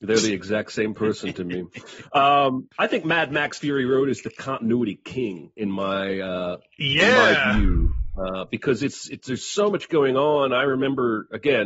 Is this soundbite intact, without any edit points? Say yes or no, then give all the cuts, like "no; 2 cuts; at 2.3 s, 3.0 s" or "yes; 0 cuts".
no; 1 cut; at 2.7 s